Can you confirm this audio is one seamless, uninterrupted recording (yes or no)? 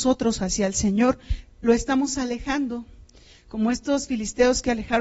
yes